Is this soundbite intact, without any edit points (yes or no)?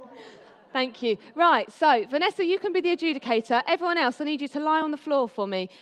yes